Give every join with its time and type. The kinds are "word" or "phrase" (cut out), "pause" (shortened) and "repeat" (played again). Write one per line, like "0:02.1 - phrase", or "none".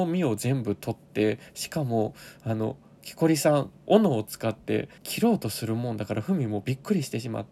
0:05.0 - pause

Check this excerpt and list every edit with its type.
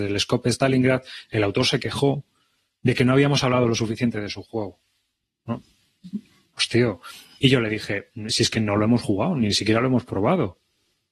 none

